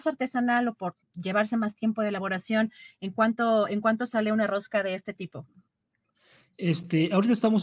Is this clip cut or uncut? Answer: uncut